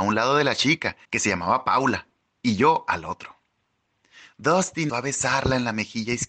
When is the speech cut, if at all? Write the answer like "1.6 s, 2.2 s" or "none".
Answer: 1.0 s, 4.9 s